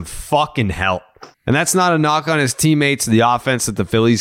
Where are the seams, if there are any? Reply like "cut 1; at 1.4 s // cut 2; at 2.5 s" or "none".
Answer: cut 1; at 1.3 s